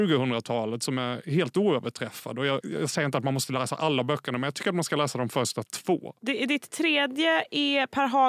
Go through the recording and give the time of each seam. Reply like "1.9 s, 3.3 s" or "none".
2.6 s